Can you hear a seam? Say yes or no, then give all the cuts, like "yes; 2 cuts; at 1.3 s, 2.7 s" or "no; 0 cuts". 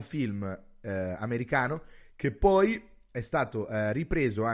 no; 0 cuts